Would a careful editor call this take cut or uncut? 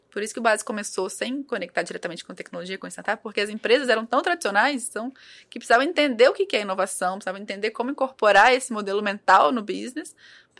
uncut